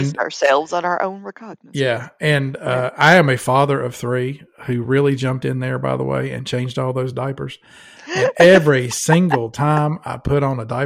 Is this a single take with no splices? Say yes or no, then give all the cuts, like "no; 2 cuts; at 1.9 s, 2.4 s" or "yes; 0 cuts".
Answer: yes; 0 cuts